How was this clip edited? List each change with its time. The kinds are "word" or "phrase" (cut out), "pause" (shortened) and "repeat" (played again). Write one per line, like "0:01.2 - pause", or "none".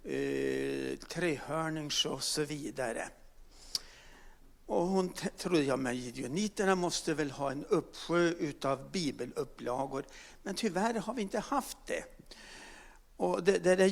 none